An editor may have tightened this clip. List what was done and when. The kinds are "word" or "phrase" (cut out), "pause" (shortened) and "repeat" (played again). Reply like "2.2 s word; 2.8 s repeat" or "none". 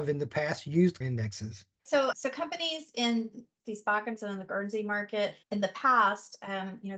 1.0 s phrase; 2.1 s word; 3.6 s word; 4.2 s word; 5.4 s pause